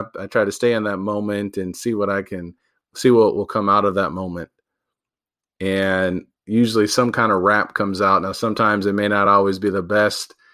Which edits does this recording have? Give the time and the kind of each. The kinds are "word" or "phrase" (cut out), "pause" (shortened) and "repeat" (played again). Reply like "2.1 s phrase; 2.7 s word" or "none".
none

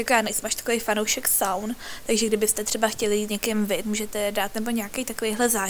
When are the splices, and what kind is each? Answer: 3.3 s word; 3.8 s word

